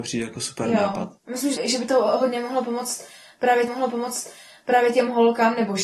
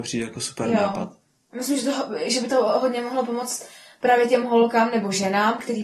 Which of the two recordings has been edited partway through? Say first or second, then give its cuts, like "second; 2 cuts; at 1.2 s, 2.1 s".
first; 3 cuts; at 1.2 s, 1.6 s, 3.7 s